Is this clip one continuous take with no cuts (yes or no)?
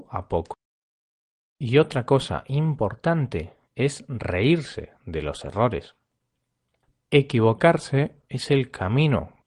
yes